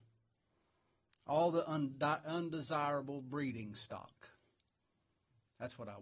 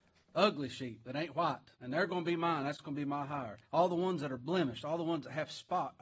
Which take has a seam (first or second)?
second